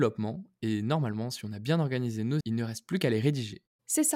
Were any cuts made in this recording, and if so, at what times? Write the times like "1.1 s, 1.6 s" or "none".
2.4 s